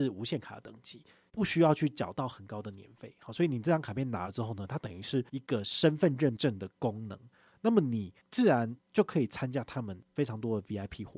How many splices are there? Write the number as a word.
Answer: one